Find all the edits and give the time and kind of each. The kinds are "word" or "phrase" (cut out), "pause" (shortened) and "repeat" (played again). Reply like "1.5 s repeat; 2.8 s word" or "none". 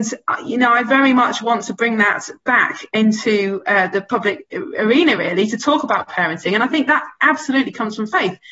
none